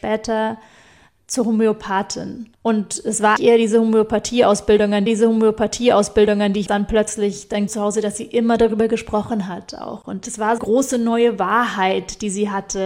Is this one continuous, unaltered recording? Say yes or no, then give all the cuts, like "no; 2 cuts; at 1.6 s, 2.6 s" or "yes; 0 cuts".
no; 6 cuts; at 2.5 s, 3.4 s, 5.1 s, 6.7 s, 7.7 s, 10.6 s